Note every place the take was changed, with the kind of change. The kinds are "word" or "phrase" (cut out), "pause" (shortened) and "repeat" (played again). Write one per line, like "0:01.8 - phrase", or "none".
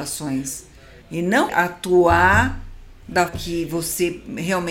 0:01.0 - pause
0:01.5 - word
0:03.3 - word